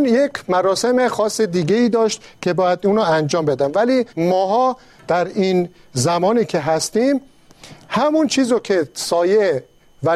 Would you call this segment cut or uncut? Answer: cut